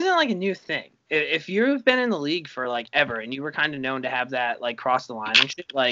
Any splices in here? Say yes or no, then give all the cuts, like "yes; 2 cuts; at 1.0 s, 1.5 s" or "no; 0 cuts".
no; 0 cuts